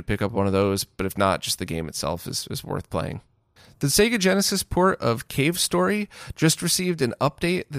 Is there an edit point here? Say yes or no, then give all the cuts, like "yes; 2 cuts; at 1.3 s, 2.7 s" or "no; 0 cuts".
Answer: yes; 1 cut; at 3.6 s